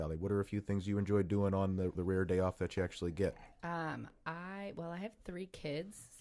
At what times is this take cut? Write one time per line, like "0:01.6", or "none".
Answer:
0:02.0
0:03.5